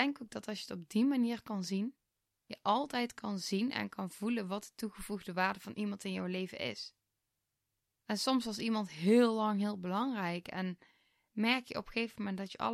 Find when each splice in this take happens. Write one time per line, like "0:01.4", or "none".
none